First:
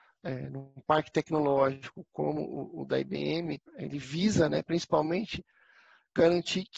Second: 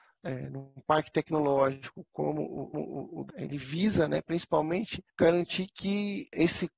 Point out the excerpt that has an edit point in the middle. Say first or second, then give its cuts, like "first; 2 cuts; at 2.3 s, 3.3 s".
second; 3 cuts; at 2.7 s, 3.3 s, 5.1 s